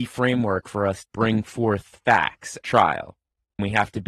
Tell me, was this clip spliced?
yes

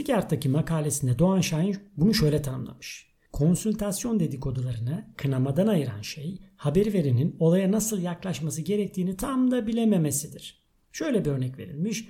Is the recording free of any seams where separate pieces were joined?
yes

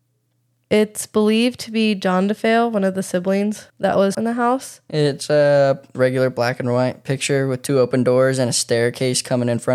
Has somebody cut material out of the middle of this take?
yes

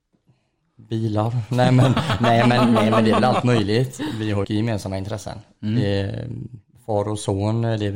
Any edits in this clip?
yes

